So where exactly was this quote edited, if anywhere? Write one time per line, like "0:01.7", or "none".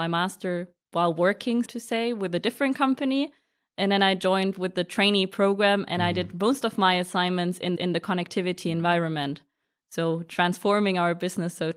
0:01.7
0:07.8

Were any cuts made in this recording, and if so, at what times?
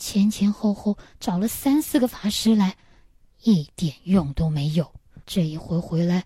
0:05.2

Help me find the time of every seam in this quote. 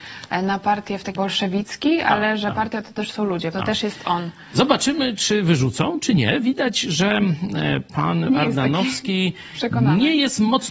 0:01.2
0:03.5
0:08.3

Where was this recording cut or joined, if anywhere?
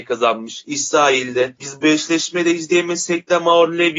none

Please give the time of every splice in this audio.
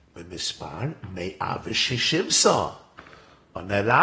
none

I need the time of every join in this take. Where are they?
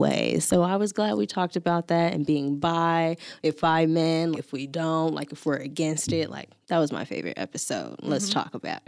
0:03.6
0:04.3
0:06.6

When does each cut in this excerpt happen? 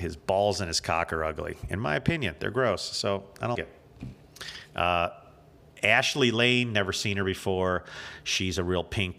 0:03.5

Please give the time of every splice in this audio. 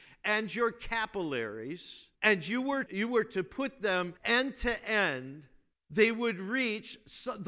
0:02.1
0:02.9
0:04.2
0:05.7

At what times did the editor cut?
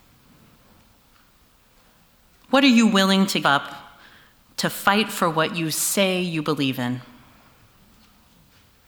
0:03.4

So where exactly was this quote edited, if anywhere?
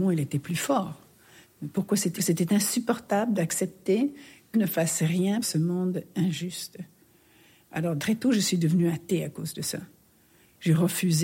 0:02.2
0:04.5
0:05.4
0:08.0

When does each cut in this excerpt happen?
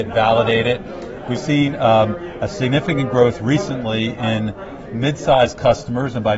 0:01.4

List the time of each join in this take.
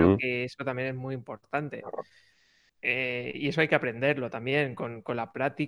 none

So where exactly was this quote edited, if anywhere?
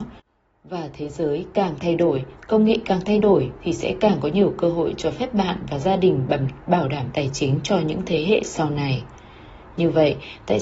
none

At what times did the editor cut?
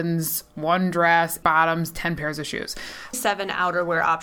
0:01.4
0:03.1

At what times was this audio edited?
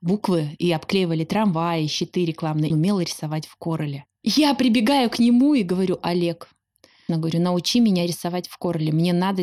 0:02.7
0:07.1

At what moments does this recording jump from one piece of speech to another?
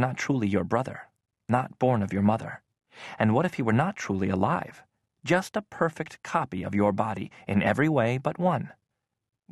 none

